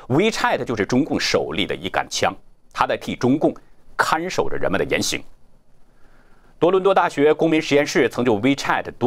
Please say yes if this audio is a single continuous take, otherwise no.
yes